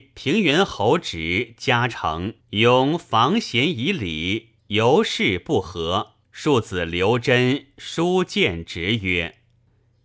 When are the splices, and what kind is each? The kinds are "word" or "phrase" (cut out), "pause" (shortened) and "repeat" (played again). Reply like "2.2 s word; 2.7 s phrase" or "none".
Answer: 2.4 s pause; 4.6 s phrase; 6.2 s pause